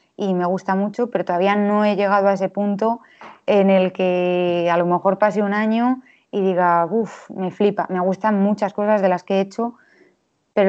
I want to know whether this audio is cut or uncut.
uncut